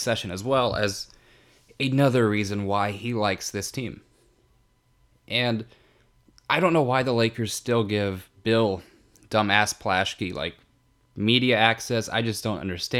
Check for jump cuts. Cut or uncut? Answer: uncut